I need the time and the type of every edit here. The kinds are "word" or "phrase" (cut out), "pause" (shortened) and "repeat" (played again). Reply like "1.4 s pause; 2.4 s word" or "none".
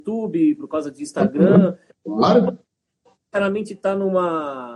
none